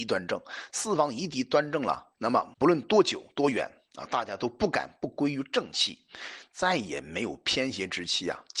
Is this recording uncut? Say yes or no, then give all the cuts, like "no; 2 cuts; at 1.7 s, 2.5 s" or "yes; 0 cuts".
no; 2 cuts; at 2.1 s, 2.5 s